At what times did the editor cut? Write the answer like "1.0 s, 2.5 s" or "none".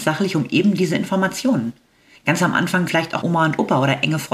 2.9 s, 3.2 s